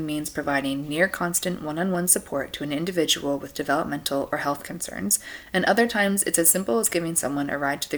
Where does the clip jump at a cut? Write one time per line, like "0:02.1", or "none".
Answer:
none